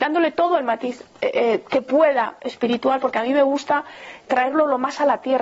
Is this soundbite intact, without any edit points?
no; 1 cut; at 4.3 s

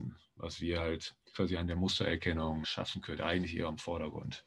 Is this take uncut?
no; 3 cuts; at 1.3 s, 2.6 s, 3.2 s

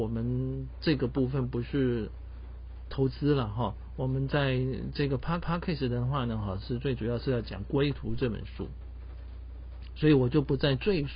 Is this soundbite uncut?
no; 1 cut; at 5.4 s

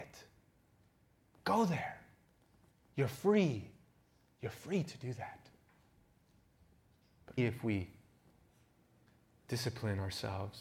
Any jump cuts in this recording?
yes; 1 cut; at 7.4 s

